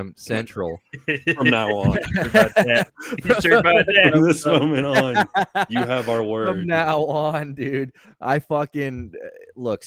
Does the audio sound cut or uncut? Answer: cut